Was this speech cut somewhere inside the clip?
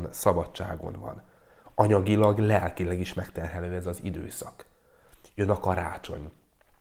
no; 0 cuts

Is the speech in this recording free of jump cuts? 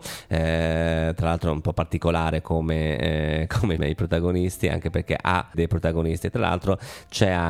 no; 2 cuts; at 3.8 s, 5.5 s

